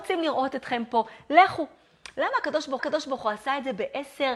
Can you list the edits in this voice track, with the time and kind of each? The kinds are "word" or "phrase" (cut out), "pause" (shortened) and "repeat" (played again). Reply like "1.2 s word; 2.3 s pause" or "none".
2.8 s repeat